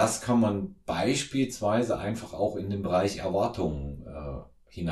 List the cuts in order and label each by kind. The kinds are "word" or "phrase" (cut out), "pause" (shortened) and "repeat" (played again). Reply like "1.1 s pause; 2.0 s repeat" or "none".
none